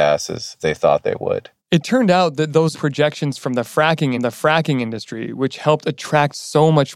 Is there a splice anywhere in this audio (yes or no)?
yes